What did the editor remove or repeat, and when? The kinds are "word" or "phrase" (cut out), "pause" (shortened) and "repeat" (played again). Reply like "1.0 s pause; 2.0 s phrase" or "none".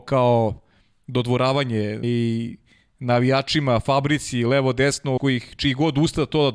2.0 s word; 5.2 s word